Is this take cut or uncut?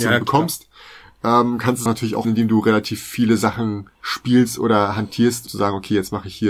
cut